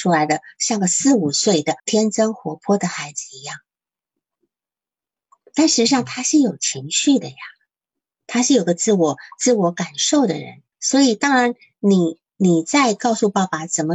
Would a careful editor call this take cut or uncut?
cut